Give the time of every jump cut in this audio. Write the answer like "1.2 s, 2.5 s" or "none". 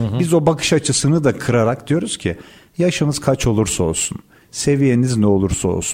none